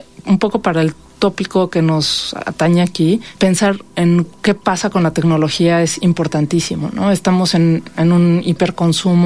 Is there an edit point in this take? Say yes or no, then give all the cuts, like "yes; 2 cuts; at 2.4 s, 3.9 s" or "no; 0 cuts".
no; 0 cuts